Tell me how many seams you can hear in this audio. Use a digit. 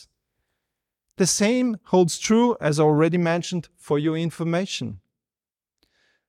0